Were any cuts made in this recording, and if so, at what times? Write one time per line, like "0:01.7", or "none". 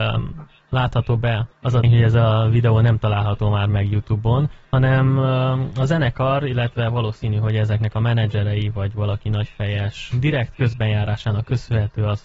0:01.5
0:01.8
0:04.6
0:10.1

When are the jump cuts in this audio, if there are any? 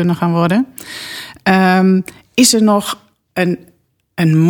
none

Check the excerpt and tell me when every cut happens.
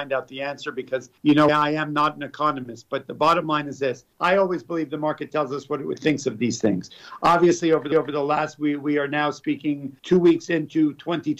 0:01.2
0:01.5
0:04.1
0:07.9
0:10.0

